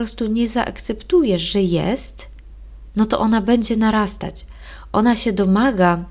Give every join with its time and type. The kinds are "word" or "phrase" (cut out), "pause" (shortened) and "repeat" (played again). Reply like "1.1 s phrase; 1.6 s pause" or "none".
none

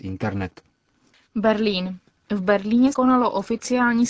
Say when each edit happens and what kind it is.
2.9 s word

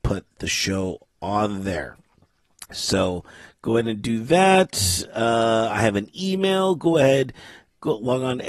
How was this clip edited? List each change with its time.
none

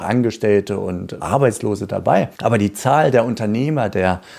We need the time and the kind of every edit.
1.2 s word; 2.3 s pause

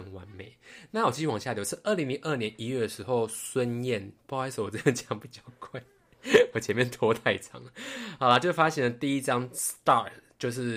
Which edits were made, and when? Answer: none

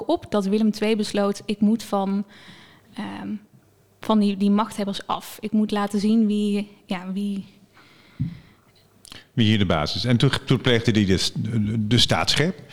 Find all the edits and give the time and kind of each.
none

